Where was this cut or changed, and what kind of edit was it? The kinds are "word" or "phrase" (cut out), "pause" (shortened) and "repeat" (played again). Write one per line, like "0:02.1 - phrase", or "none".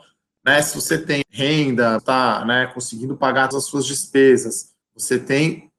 0:01.2 - word
0:02.0 - word
0:03.5 - word
0:04.8 - pause